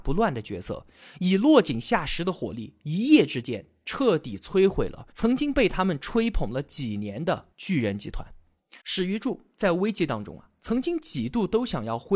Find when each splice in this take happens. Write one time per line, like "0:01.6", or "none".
0:05.1
0:07.5
0:08.8